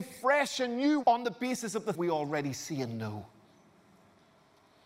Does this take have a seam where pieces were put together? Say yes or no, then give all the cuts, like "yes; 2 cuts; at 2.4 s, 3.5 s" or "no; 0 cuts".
yes; 2 cuts; at 1.0 s, 1.9 s